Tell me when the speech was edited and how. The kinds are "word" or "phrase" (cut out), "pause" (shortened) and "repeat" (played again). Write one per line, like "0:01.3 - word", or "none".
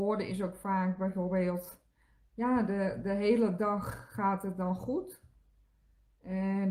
none